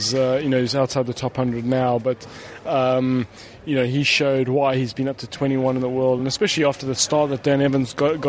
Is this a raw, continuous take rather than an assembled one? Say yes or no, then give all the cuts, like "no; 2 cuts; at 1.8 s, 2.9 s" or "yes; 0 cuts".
yes; 0 cuts